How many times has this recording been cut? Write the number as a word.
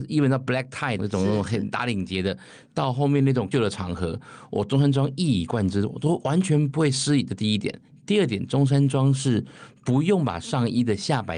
one